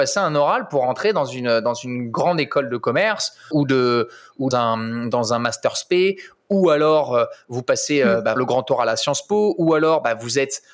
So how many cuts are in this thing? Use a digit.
3